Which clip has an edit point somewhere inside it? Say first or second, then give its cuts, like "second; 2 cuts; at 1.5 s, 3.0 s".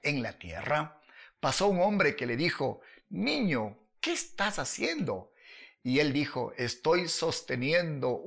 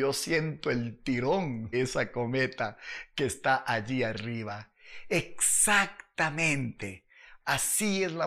second; 1 cut; at 1.7 s